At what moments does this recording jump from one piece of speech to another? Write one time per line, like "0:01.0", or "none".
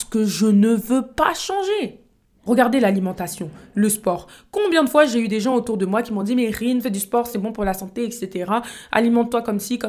none